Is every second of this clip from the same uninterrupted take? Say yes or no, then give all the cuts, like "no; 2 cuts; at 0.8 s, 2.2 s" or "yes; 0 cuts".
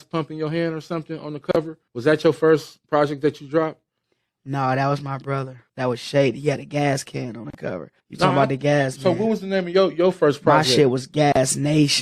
no; 5 cuts; at 1.9 s, 2.8 s, 4.0 s, 5.7 s, 8.0 s